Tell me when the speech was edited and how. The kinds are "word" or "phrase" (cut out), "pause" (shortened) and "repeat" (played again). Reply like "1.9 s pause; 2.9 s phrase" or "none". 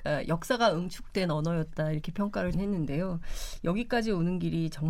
2.5 s word